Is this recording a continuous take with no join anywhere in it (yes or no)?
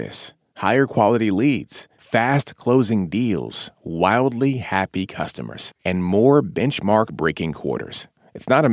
yes